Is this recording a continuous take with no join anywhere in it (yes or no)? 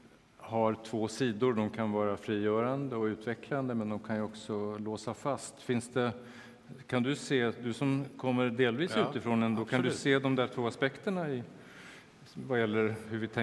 yes